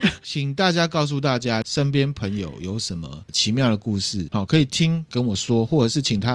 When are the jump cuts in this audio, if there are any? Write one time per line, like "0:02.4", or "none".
0:04.3